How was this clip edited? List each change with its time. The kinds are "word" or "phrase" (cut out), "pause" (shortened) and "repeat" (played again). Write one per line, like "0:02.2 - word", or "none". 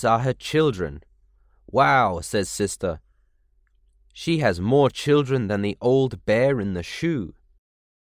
none